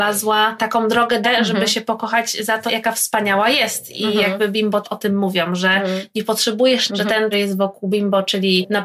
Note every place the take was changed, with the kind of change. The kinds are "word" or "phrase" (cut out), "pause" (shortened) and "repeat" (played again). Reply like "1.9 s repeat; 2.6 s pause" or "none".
1.2 s word; 2.7 s word; 4.8 s word; 6.9 s word; 7.3 s phrase